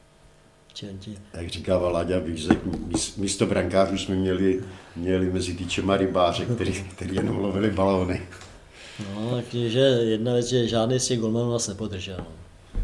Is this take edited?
no; 0 cuts

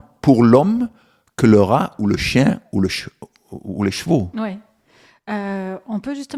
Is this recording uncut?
yes; 0 cuts

